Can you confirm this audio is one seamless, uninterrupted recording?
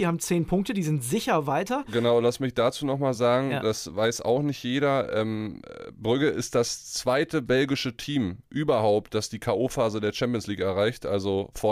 yes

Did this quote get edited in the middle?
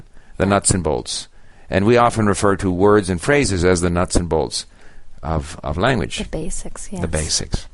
no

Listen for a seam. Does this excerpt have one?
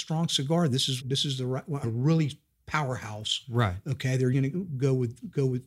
yes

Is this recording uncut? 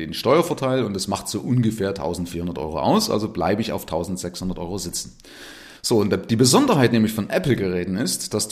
no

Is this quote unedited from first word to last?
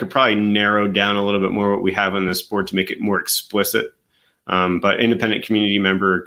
yes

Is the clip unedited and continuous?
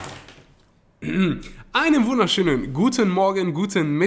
yes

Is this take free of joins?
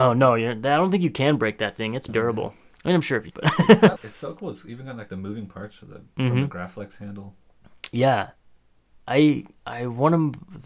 no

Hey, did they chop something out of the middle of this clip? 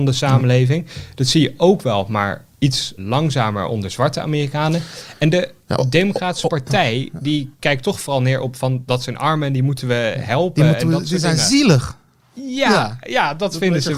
yes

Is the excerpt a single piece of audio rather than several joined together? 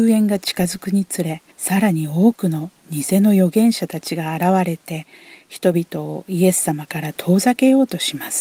no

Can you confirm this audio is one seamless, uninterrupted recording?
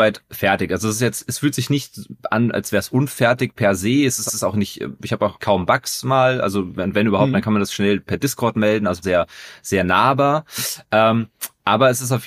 no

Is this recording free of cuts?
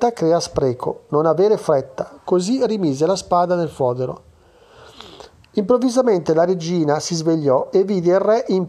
yes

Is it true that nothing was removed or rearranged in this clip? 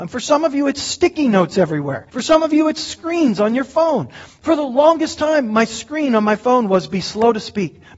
no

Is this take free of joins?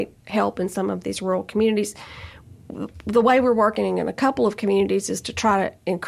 yes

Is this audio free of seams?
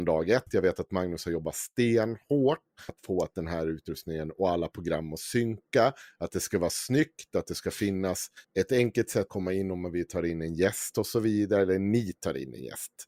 no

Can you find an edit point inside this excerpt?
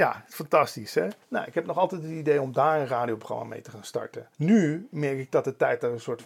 yes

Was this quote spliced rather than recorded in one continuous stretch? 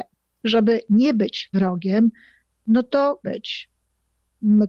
yes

